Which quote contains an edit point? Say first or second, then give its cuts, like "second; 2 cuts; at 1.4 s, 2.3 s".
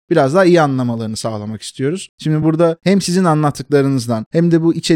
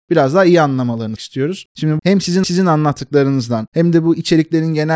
second; 3 cuts; at 1.2 s, 2.0 s, 2.4 s